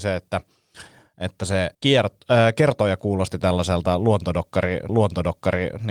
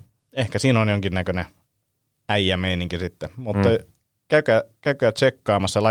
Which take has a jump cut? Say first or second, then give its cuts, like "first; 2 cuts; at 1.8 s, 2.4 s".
first; 2 cuts; at 1.7 s, 4.9 s